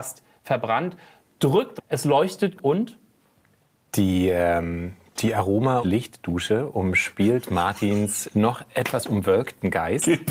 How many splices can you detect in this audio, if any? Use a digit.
4